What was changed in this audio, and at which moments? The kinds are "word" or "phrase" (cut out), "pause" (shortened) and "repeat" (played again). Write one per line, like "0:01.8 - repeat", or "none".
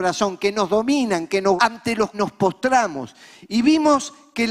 0:01.6 - word
0:02.1 - word